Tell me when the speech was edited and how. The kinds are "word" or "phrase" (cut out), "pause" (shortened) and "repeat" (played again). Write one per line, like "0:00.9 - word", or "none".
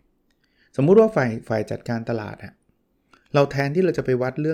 none

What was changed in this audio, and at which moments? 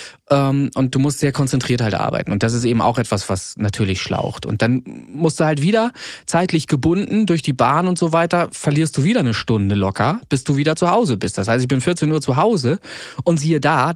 none

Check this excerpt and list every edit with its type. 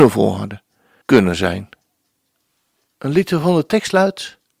0:01.0 - phrase

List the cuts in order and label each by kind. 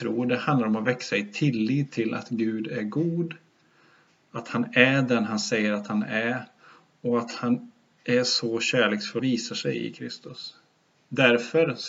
0:09.2 - phrase

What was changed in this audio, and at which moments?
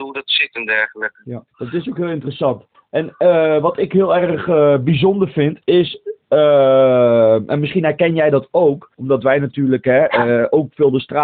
0:01.5 - pause
0:02.7 - pause
0:05.6 - pause
0:08.9 - pause

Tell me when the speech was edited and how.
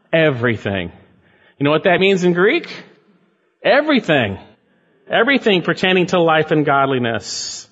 none

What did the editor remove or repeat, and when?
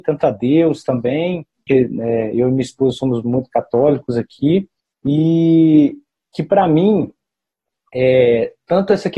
0:01.7 - word

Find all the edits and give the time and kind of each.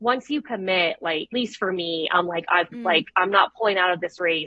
0:01.3 - word
0:02.7 - word

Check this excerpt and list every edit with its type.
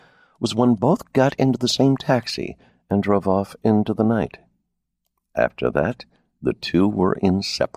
none

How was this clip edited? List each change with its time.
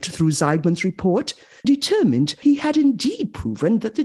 0:01.6 - word
0:02.4 - word

